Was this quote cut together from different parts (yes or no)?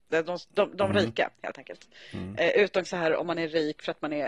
yes